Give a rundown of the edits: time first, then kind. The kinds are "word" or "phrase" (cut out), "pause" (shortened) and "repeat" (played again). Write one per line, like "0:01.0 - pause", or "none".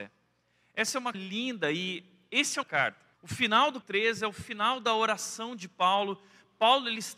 0:01.1 - word
0:02.6 - phrase
0:03.1 - pause
0:03.8 - word